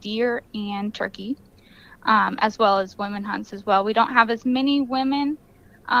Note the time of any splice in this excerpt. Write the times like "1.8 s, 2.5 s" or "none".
none